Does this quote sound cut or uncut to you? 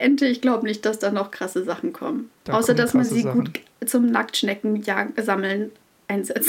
uncut